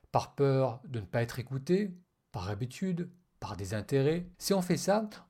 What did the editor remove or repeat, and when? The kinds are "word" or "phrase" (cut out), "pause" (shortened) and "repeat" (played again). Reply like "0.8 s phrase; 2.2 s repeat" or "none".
2.0 s pause; 4.3 s pause